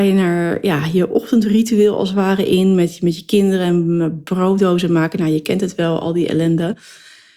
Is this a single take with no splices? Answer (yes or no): yes